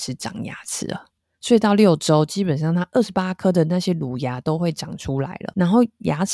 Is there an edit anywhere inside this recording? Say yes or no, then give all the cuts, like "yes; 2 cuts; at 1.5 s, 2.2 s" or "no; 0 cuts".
no; 0 cuts